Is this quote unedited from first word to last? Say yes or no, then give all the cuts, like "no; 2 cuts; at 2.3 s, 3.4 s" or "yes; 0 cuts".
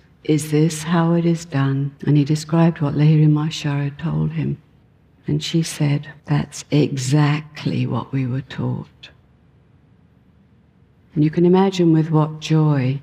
no; 3 cuts; at 2.0 s, 4.8 s, 6.2 s